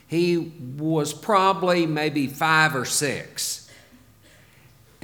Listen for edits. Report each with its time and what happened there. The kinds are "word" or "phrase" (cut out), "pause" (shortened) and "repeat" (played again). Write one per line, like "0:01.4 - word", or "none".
none